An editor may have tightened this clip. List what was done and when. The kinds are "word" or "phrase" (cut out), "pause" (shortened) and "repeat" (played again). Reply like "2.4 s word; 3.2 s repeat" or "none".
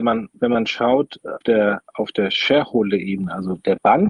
1.4 s word